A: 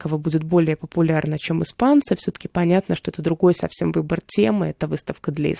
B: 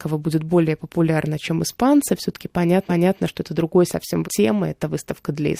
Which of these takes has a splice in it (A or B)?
B